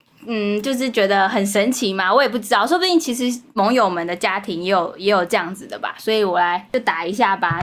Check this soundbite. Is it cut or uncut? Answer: cut